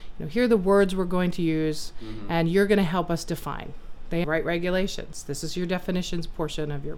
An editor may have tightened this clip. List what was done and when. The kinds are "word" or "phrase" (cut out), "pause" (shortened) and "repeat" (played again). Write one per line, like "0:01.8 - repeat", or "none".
0:04.2 - phrase